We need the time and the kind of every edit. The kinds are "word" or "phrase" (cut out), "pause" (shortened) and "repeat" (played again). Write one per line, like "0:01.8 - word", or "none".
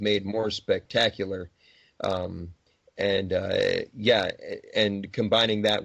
none